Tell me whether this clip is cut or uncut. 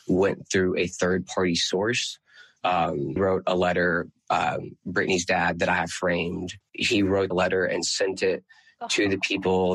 cut